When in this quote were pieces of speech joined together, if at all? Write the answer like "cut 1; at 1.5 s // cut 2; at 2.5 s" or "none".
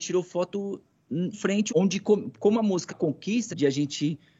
cut 1; at 1.3 s // cut 2; at 1.7 s // cut 3; at 2.9 s // cut 4; at 3.5 s